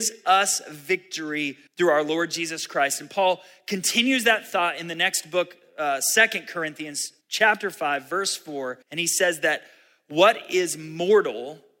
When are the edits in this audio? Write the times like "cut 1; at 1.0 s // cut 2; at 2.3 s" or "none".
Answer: cut 1; at 1.7 s // cut 2; at 7.2 s // cut 3; at 8.8 s